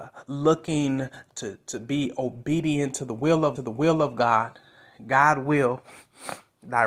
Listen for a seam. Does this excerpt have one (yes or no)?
yes